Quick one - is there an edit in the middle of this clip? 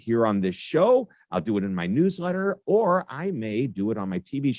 no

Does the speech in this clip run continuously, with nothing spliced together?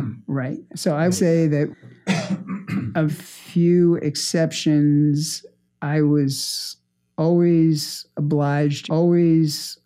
no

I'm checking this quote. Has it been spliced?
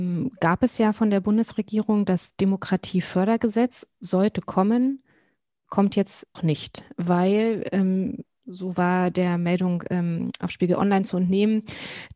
yes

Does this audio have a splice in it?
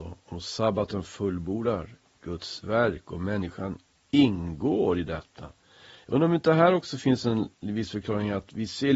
no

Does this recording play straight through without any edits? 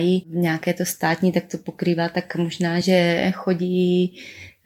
yes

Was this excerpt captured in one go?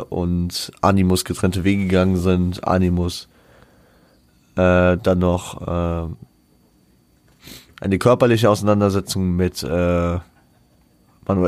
yes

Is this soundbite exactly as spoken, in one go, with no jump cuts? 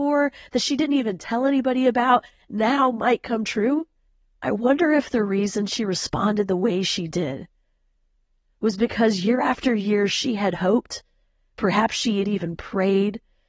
yes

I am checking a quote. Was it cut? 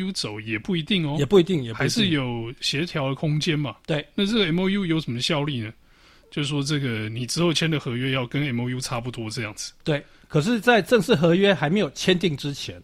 no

